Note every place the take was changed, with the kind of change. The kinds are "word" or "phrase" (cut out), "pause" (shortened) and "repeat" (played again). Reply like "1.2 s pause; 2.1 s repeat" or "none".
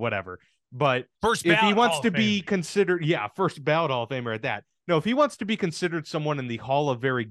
1.1 s pause